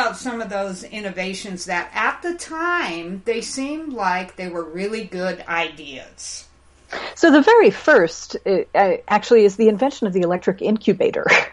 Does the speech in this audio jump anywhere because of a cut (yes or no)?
no